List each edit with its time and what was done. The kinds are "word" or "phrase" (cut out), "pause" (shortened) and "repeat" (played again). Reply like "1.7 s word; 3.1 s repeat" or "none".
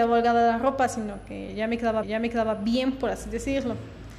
2.0 s repeat